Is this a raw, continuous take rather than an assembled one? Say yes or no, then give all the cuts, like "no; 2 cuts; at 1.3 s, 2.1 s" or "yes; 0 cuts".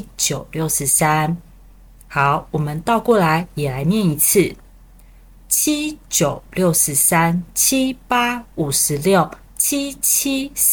yes; 0 cuts